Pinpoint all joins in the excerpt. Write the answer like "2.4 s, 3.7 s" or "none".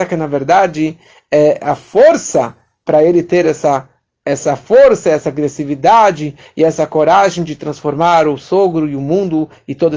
none